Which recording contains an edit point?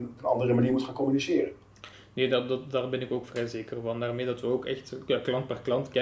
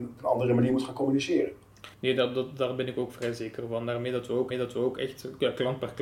second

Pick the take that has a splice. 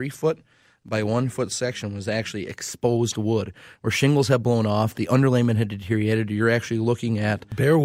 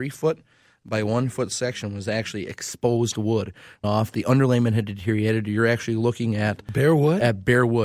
second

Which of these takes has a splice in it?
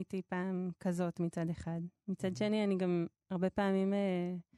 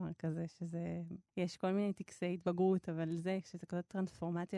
second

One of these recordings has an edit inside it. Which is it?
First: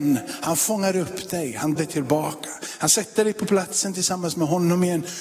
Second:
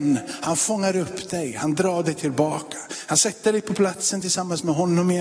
first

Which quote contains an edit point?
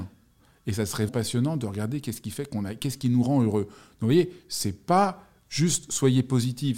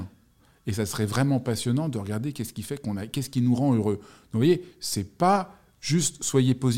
first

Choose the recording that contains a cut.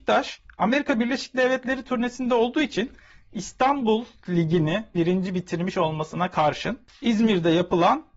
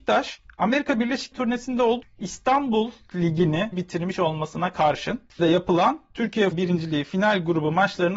second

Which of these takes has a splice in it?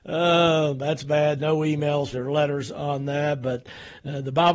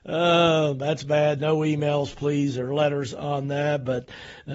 first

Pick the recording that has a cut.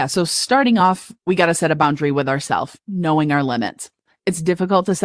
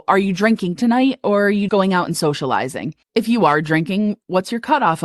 second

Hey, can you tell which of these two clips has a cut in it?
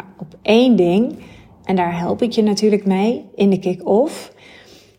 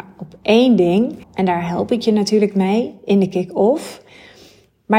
second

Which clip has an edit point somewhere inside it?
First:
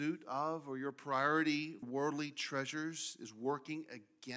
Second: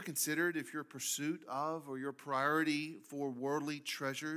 first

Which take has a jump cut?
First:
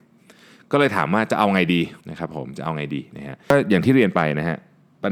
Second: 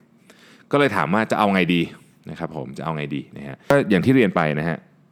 first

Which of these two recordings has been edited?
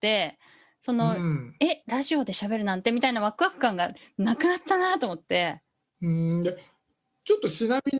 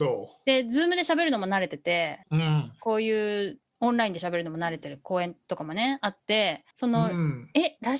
second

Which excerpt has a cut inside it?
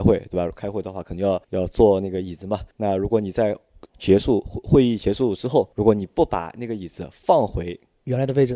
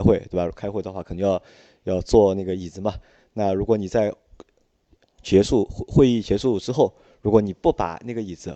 first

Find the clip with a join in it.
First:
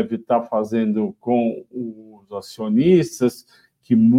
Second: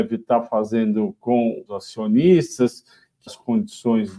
second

